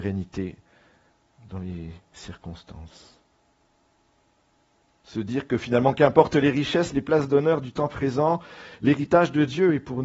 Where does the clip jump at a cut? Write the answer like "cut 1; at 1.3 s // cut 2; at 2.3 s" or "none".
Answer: none